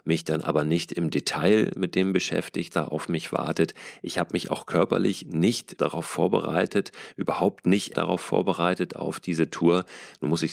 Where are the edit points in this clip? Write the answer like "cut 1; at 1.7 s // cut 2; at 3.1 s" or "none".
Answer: cut 1; at 2.7 s // cut 2; at 5.8 s // cut 3; at 7.9 s